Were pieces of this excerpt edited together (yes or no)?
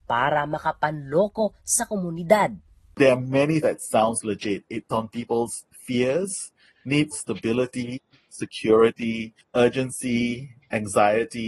yes